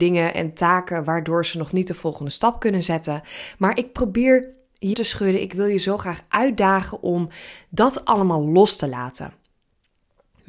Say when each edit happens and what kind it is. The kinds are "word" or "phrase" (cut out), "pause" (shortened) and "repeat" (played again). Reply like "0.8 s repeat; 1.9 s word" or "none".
4.9 s phrase